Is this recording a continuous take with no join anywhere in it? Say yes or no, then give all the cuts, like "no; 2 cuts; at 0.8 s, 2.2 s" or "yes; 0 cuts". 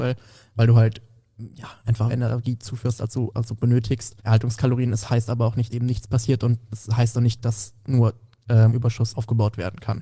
no; 6 cuts; at 2.1 s, 4.2 s, 5.7 s, 7.4 s, 8.7 s, 9.1 s